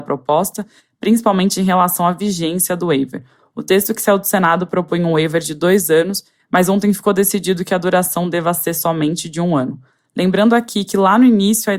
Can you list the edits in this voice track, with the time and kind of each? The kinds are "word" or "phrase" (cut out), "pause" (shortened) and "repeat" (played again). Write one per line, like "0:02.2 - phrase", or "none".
none